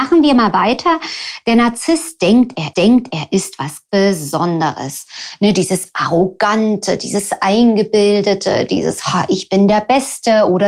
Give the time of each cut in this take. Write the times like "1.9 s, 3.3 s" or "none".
2.7 s, 3.9 s